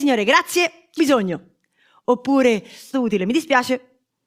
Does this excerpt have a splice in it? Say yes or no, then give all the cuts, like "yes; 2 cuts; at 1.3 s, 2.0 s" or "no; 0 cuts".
yes; 2 cuts; at 1.0 s, 2.9 s